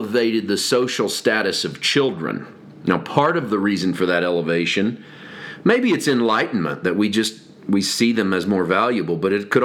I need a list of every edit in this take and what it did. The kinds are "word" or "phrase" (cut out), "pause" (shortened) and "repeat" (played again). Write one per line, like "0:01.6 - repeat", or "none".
none